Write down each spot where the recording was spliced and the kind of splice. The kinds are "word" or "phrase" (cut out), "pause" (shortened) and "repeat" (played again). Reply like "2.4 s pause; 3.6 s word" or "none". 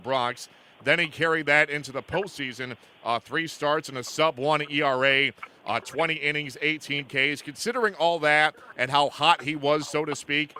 none